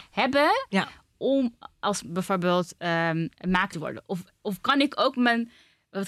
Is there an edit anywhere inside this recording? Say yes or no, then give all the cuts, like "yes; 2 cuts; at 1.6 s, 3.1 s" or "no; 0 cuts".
yes; 1 cut; at 3.7 s